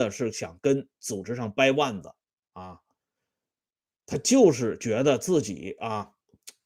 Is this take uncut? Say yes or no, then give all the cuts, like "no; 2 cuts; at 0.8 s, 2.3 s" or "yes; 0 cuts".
yes; 0 cuts